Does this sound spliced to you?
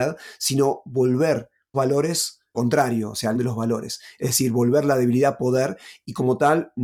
yes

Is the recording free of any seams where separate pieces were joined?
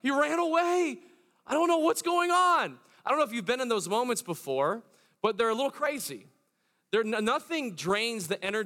yes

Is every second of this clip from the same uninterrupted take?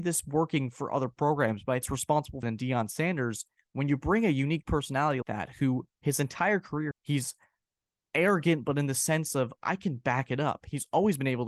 no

